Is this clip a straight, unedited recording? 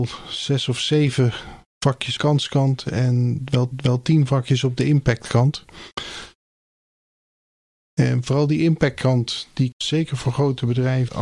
no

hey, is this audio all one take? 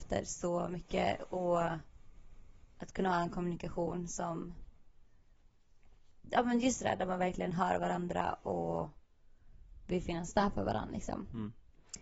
yes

